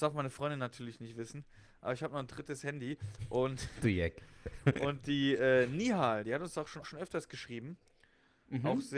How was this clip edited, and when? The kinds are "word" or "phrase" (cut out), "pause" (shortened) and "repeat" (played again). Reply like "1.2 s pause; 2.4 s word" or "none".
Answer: 6.8 s word